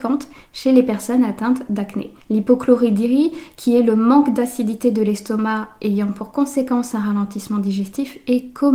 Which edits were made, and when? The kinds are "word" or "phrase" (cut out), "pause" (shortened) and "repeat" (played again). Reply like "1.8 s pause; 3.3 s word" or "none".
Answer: 2.2 s pause